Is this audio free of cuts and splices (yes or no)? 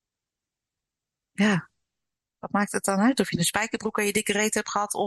yes